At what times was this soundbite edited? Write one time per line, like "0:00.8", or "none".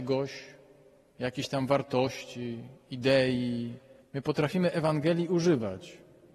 0:04.0